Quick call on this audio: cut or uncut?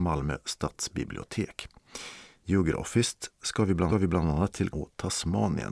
cut